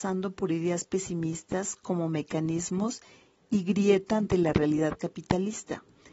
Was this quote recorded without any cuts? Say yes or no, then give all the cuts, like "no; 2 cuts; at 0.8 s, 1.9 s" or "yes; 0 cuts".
yes; 0 cuts